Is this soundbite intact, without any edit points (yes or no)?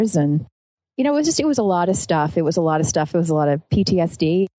yes